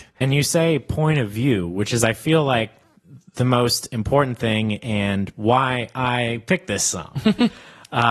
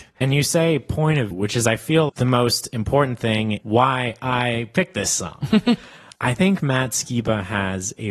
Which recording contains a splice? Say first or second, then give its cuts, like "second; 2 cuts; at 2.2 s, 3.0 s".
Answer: second; 4 cuts; at 1.3 s, 2.1 s, 3.6 s, 6.2 s